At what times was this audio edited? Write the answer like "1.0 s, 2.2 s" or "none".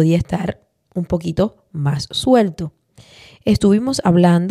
none